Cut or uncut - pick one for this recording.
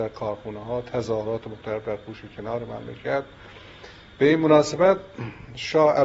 uncut